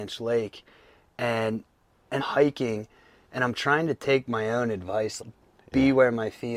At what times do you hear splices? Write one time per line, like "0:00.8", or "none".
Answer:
0:02.2
0:05.2